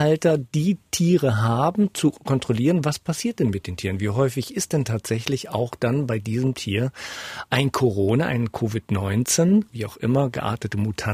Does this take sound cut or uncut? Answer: cut